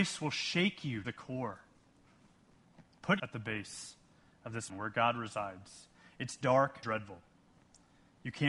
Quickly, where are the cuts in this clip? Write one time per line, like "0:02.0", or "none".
0:01.0
0:03.2
0:04.7
0:06.8